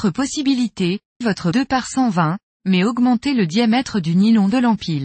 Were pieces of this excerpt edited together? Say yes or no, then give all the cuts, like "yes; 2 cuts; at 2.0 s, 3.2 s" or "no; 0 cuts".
yes; 2 cuts; at 1.2 s, 1.5 s